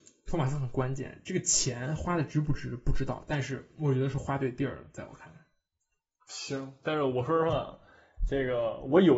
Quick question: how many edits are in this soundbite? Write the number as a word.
zero